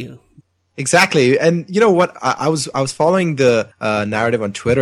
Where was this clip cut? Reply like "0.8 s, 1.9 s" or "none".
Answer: 3.7 s